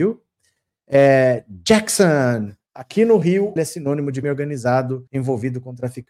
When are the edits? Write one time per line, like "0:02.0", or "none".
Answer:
0:03.6
0:04.2
0:05.1